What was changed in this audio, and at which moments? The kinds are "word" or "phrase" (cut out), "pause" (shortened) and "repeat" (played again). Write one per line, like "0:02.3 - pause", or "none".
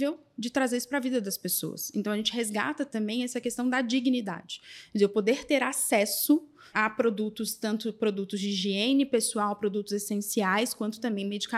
0:06.7 - word